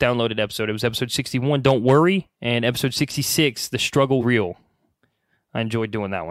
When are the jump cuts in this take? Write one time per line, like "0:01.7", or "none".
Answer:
0:02.3
0:04.2